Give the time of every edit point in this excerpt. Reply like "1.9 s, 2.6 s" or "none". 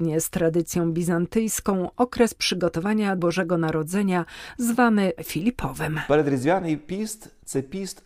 3.2 s, 5.2 s

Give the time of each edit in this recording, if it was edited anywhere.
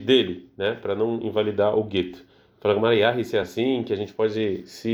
none

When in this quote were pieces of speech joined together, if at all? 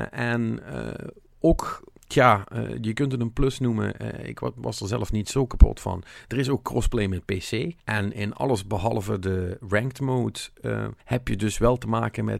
2.0 s, 7.8 s, 11.0 s

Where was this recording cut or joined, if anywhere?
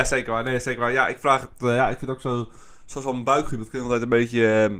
none

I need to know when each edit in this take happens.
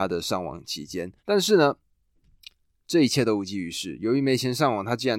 1.2 s

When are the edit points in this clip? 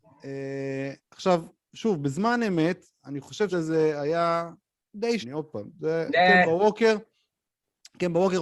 1.0 s, 3.5 s, 5.2 s

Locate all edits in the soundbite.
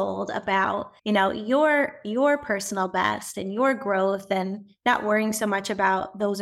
1.0 s

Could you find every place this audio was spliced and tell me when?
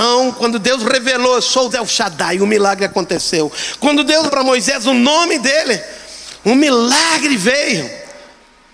1.7 s, 4.3 s

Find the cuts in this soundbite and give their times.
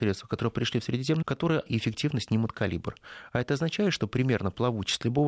1.2 s, 1.7 s

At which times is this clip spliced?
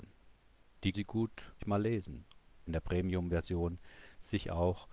0.9 s, 1.6 s, 2.7 s

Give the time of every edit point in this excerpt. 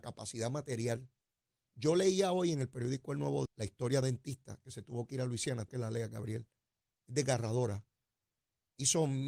3.5 s, 4.0 s, 5.7 s

